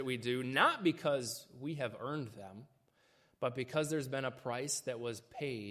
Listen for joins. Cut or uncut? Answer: uncut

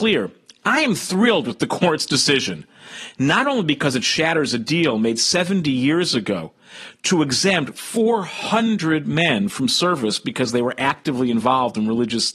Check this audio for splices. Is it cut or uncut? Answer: uncut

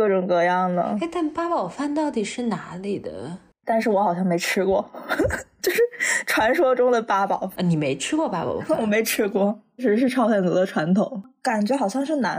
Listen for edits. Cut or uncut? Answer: uncut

